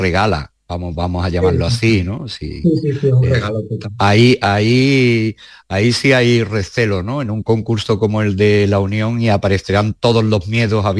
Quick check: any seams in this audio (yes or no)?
no